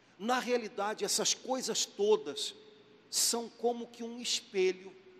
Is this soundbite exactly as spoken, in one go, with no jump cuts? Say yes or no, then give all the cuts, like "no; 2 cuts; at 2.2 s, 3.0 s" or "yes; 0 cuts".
yes; 0 cuts